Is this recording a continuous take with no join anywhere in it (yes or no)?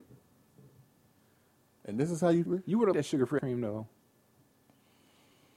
no